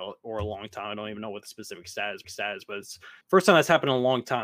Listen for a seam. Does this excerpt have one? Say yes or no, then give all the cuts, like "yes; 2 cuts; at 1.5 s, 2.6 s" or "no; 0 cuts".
yes; 2 cuts; at 2.2 s, 3.2 s